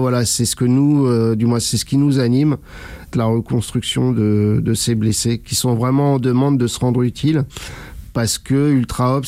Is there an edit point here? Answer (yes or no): yes